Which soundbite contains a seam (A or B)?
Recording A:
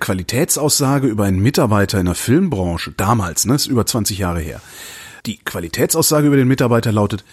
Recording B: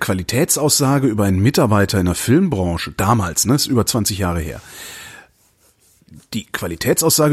A